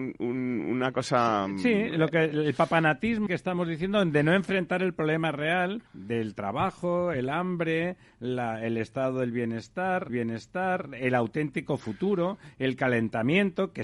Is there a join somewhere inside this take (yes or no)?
yes